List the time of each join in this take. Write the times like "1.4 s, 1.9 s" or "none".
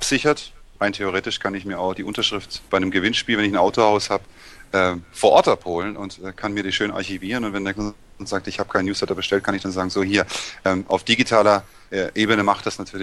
2.7 s, 7.8 s

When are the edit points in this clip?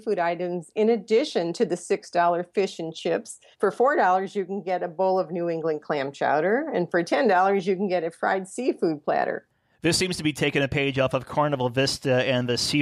3.5 s

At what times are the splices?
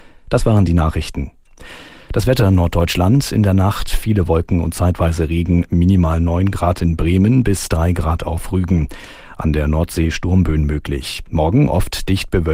none

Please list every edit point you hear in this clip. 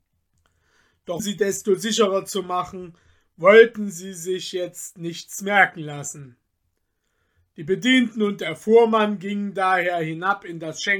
1.2 s

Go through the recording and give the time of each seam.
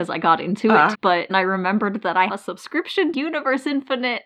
0.9 s, 1.3 s, 2.3 s, 3.1 s

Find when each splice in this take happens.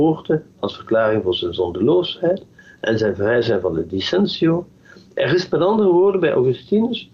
none

